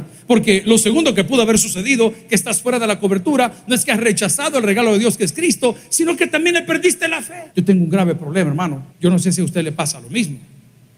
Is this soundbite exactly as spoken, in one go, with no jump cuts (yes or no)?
no